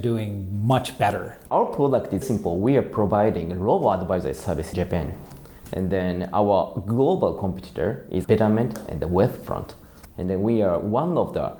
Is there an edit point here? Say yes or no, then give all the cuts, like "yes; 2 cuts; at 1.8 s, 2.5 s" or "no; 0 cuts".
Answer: yes; 3 cuts; at 2.2 s, 4.7 s, 8.2 s